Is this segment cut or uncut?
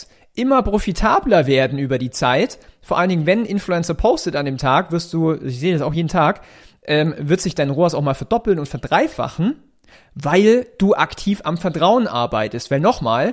uncut